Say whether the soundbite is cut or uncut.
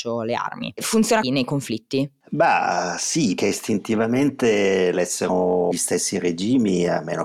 cut